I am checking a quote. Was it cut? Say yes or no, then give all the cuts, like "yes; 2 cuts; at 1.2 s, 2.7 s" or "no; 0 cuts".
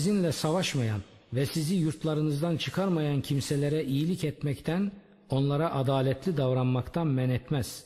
no; 0 cuts